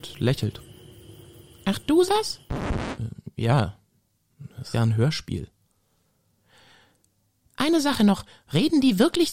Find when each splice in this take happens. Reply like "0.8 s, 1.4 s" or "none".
2.1 s, 4.7 s